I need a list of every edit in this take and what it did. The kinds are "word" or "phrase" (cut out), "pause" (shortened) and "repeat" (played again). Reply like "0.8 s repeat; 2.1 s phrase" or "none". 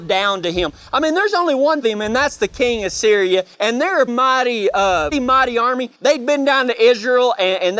1.8 s phrase; 3.5 s pause; 4.1 s word; 5.1 s word; 5.9 s pause